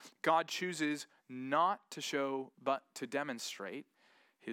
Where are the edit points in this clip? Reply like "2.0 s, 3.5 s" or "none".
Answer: 2.5 s